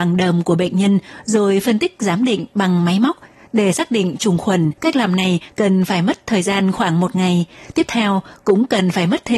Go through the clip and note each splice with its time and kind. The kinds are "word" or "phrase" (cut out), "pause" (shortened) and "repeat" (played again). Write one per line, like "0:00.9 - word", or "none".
0:04.8 - pause